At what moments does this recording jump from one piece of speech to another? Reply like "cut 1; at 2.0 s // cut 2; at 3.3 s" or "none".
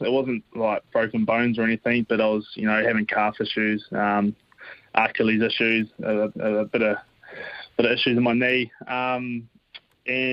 cut 1; at 6.3 s